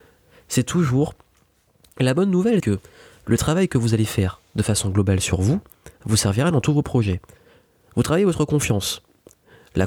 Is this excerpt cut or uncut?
cut